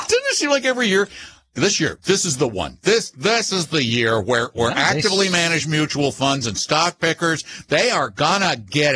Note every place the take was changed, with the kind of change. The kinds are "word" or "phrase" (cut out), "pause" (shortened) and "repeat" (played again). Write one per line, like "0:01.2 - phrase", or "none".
none